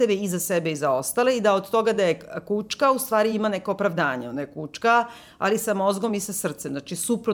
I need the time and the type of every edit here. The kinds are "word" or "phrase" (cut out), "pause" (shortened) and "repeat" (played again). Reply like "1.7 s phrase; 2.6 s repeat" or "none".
none